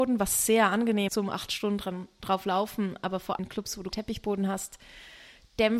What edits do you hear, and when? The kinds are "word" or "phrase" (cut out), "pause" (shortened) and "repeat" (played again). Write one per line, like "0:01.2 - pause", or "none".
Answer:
0:01.1 - word
0:03.4 - word
0:03.9 - word